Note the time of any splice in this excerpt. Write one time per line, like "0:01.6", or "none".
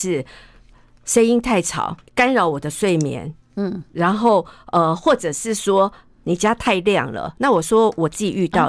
0:02.1